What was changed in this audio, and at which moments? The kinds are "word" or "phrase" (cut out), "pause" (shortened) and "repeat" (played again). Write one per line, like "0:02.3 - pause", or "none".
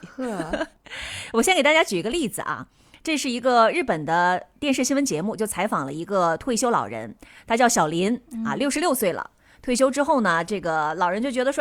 none